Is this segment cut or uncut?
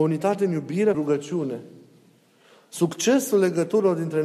cut